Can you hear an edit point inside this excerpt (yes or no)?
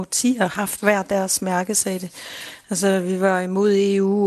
no